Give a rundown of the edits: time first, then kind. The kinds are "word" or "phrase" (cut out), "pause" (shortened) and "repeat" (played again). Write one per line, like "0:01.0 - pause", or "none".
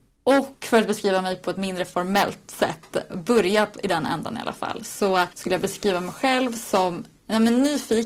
0:03.1 - word
0:05.3 - pause